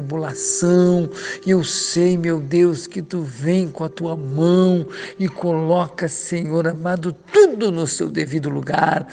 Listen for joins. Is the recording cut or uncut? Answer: uncut